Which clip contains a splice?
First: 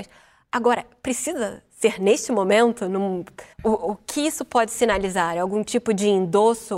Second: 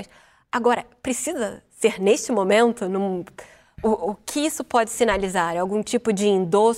first; 1 cut; at 3.5 s

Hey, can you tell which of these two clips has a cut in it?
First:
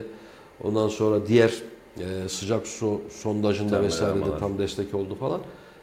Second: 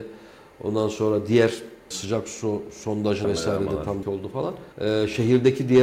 second; 4 cuts; at 1.9 s, 3.2 s, 4.0 s, 4.7 s

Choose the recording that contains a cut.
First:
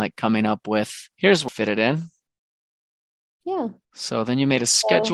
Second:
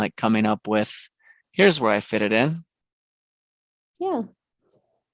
first; 3 cuts; at 1.1 s, 1.5 s, 3.8 s

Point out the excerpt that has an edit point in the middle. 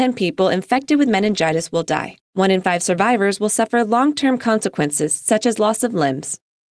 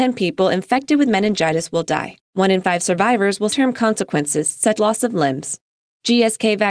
second; 2 cuts; at 3.5 s, 4.8 s

